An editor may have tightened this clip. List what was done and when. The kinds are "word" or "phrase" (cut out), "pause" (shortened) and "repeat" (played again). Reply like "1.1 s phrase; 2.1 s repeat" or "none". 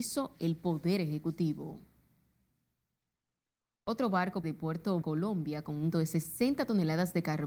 4.4 s word; 5.0 s word; 5.9 s word